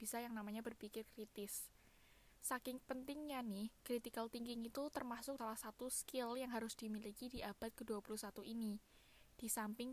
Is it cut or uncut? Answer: cut